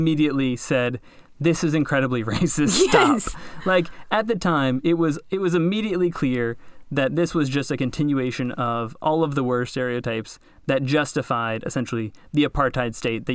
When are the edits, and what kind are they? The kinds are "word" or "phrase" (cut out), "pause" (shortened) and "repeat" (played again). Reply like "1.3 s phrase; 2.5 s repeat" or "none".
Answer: none